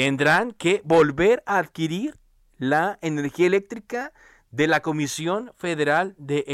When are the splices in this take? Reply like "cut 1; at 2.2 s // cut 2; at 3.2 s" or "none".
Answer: none